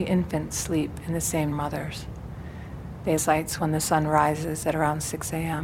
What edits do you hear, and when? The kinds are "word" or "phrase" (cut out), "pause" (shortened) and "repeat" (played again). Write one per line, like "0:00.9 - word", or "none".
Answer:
0:01.5 - phrase
0:03.2 - phrase